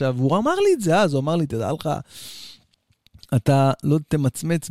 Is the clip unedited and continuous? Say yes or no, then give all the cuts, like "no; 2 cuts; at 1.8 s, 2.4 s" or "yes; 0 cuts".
yes; 0 cuts